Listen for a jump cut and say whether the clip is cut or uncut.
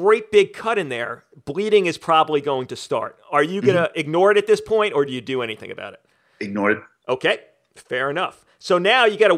uncut